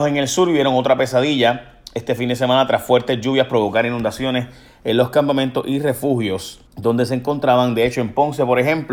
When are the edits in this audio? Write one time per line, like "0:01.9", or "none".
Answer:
0:06.7